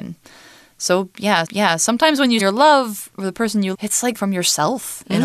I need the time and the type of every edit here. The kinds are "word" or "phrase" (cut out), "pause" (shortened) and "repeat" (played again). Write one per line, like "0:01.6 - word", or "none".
0:01.4 - repeat
0:02.4 - phrase
0:03.7 - word
0:04.1 - word